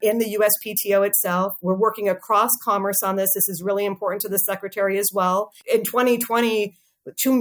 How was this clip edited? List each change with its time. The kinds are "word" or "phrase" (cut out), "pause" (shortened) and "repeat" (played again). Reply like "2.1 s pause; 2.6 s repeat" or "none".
5.6 s pause